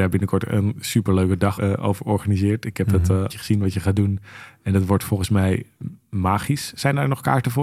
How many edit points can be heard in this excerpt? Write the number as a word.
two